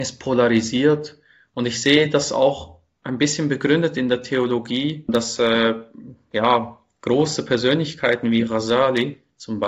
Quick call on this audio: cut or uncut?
uncut